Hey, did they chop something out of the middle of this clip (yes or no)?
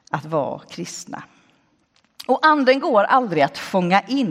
no